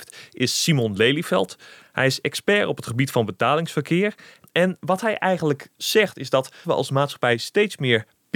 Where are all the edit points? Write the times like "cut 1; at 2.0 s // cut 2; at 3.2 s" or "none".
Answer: cut 1; at 6.6 s